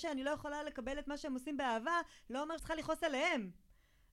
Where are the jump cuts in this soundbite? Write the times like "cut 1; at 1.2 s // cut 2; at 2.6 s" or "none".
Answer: cut 1; at 2.6 s